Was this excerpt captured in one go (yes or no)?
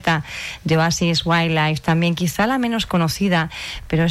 yes